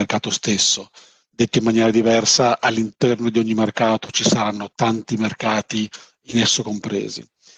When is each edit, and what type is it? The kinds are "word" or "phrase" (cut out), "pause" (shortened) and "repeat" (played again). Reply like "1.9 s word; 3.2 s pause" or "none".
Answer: none